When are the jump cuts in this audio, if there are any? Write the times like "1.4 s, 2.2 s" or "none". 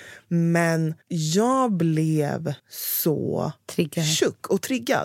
1.0 s, 2.6 s